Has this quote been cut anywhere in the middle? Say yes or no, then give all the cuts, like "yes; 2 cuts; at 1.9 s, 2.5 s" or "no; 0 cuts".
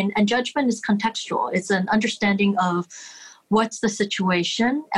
no; 0 cuts